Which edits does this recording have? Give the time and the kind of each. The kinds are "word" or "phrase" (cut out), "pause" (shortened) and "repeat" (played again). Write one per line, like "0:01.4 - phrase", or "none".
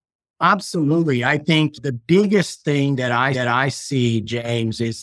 0:03.3 - repeat